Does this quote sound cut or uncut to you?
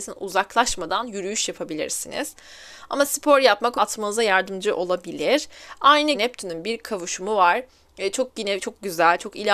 cut